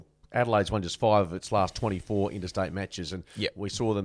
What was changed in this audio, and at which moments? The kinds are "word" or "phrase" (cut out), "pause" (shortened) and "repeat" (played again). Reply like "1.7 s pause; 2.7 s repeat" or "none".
none